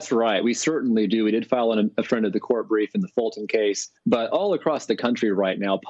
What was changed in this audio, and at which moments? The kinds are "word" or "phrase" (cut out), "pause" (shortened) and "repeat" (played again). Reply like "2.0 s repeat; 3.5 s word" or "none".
4.0 s pause